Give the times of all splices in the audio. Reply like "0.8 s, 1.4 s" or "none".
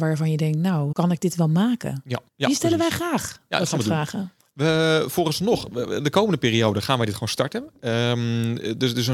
0.9 s, 2.3 s

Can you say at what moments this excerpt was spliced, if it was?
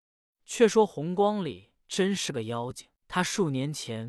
1.8 s, 3.0 s

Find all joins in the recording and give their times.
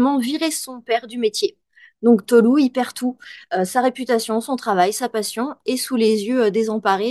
none

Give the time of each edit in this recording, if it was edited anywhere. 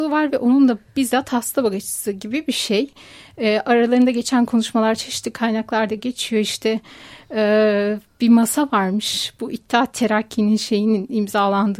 none

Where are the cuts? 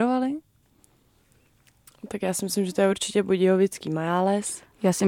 none

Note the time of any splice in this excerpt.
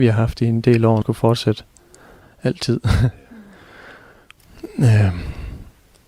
1.0 s

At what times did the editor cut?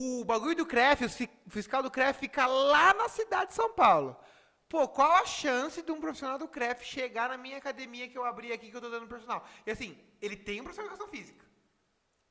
none

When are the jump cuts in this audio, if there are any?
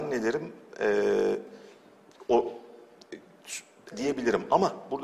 3.9 s

